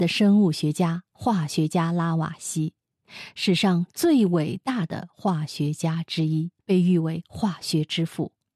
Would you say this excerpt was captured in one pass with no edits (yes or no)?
no